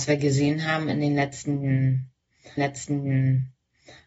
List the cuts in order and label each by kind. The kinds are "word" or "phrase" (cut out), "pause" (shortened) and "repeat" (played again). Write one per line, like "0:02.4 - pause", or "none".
0:02.6 - repeat